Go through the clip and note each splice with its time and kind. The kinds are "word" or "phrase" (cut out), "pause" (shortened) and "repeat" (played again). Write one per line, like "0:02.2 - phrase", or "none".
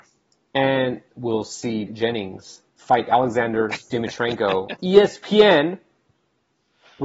0:01.1 - phrase
0:01.9 - word
0:02.7 - pause
0:04.8 - word